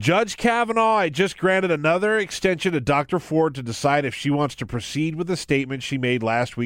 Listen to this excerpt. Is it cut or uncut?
uncut